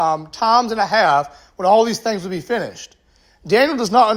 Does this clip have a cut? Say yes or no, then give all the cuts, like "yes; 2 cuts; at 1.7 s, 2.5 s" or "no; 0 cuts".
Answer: no; 0 cuts